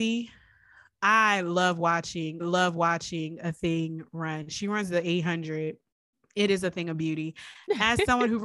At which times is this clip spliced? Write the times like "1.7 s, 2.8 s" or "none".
2.4 s, 6.1 s